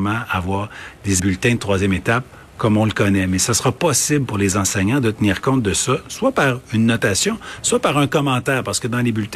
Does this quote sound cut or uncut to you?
cut